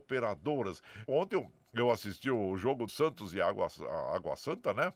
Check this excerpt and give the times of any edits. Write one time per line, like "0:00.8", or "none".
0:01.1
0:02.9